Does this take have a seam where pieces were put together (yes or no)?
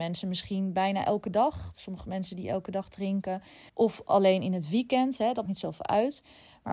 yes